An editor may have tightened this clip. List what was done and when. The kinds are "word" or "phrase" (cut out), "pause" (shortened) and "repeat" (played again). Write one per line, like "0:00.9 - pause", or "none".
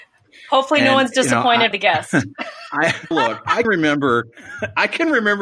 0:01.7 - phrase
0:03.1 - word
0:03.6 - word